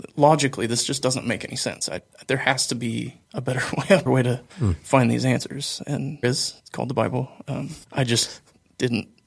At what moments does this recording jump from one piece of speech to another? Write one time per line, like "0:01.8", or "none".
0:03.2
0:04.1
0:04.5
0:06.2
0:06.6
0:07.8